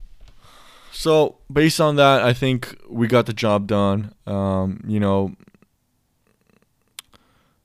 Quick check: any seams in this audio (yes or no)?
no